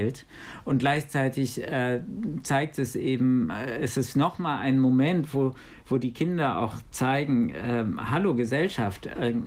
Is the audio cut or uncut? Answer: uncut